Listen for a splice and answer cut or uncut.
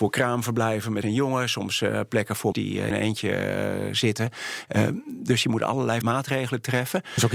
cut